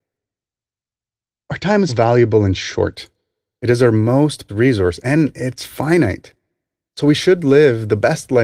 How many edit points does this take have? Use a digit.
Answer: 2